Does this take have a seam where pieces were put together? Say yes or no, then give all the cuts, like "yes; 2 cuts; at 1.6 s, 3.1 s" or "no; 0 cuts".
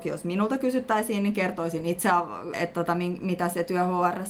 yes; 1 cut; at 2.5 s